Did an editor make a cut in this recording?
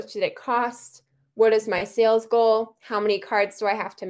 no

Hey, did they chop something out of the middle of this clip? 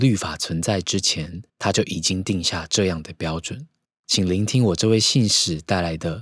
yes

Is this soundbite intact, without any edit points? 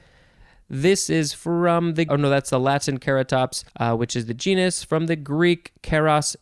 no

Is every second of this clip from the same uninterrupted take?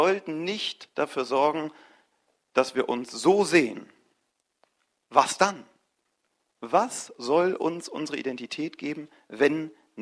yes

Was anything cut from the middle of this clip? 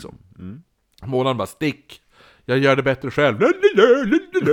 no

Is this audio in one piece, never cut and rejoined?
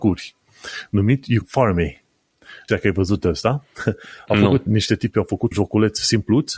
no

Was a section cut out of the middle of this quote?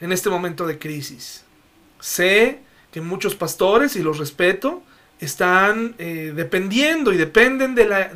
yes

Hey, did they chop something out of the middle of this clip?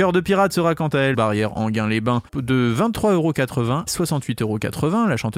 yes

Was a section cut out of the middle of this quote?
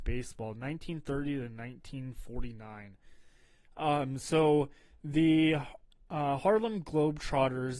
no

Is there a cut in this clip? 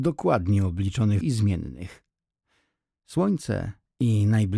yes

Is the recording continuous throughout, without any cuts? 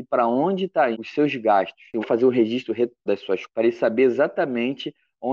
no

